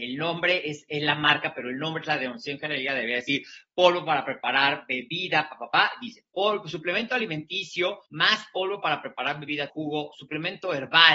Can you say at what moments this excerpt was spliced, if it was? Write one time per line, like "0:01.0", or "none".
0:08.1
0:09.7